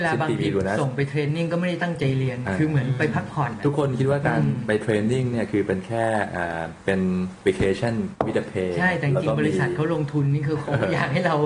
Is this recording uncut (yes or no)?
no